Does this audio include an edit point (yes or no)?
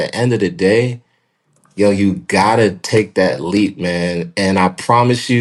no